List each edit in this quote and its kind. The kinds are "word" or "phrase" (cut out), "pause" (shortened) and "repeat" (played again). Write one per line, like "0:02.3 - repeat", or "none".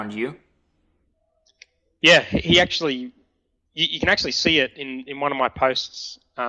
none